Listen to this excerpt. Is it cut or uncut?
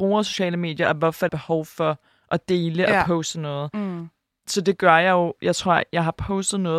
cut